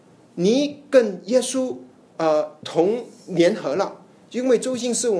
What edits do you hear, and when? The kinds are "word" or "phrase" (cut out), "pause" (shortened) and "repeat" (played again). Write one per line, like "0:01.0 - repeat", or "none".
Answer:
0:02.1 - pause